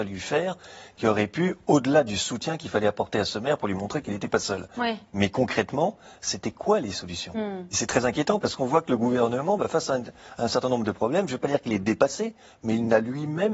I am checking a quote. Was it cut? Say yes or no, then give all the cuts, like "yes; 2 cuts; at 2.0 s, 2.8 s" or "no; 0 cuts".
no; 0 cuts